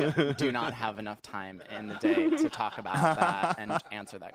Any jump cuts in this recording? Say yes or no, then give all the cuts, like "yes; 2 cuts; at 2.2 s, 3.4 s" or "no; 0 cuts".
no; 0 cuts